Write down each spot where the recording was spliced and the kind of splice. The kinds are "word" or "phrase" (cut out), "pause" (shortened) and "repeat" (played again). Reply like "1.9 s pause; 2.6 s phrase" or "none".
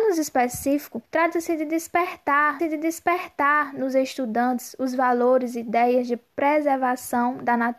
1.1 s pause; 2.6 s repeat